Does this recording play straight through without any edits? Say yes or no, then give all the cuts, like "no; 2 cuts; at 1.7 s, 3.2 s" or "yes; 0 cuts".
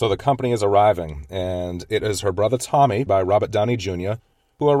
no; 1 cut; at 3.1 s